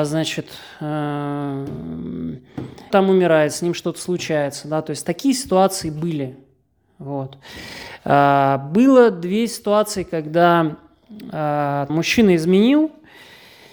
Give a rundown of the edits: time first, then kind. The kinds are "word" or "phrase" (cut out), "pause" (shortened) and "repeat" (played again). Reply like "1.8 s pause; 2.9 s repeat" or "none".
2.9 s word; 11.9 s word